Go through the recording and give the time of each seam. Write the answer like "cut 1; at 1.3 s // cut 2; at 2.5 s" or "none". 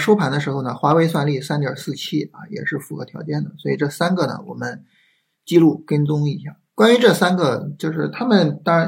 cut 1; at 6.7 s